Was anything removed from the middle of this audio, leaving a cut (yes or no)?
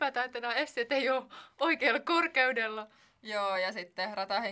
no